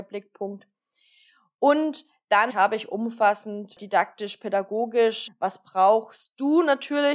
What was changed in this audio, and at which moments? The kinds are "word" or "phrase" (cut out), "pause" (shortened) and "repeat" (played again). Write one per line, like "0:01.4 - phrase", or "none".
0:02.5 - word
0:05.3 - phrase